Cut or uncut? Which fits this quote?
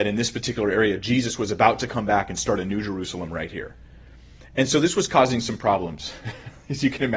uncut